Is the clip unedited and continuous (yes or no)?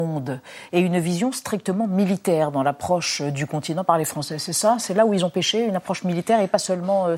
yes